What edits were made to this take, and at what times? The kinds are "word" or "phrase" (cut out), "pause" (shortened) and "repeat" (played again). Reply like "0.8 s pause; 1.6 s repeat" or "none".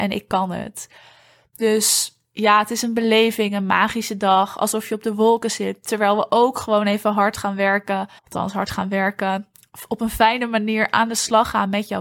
8.2 s pause